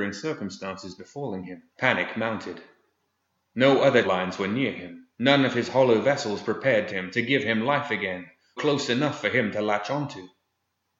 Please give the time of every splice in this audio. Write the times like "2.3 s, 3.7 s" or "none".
1.7 s, 4.0 s, 5.1 s, 6.9 s, 8.6 s